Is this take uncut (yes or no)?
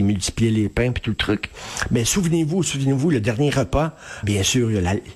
no